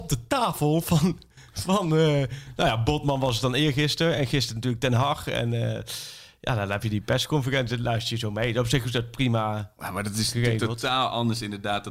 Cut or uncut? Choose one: uncut